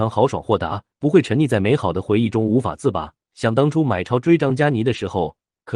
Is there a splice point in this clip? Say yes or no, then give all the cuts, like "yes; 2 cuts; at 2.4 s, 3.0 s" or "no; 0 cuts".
yes; 2 cuts; at 0.9 s, 3.2 s